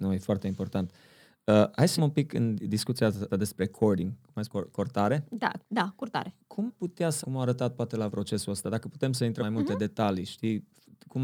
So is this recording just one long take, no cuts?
no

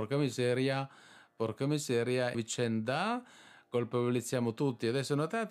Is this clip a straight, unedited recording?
no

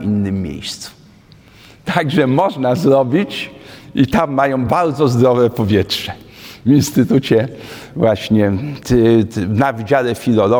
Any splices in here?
no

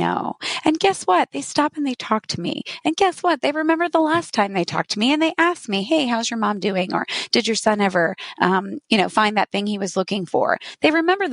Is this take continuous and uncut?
yes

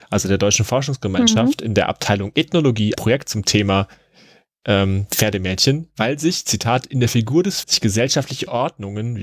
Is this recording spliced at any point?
yes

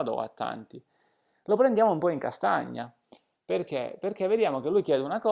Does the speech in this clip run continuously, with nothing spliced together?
yes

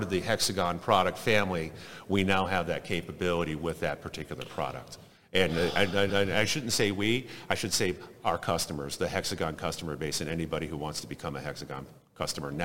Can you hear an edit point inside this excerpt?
yes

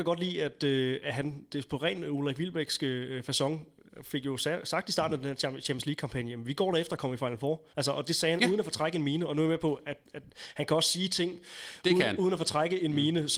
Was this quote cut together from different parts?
yes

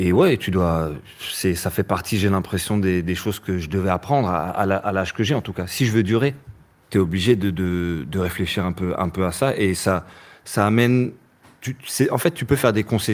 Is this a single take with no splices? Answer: yes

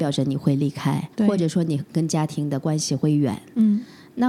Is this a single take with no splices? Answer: no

